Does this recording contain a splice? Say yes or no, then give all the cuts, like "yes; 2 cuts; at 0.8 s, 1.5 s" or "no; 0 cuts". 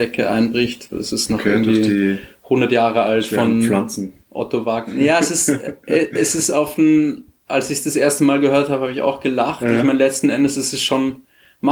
no; 0 cuts